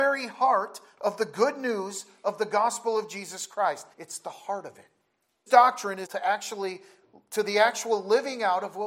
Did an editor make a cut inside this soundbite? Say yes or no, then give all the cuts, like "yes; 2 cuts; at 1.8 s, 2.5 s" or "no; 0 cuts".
yes; 3 cuts; at 3.9 s, 5.5 s, 6.1 s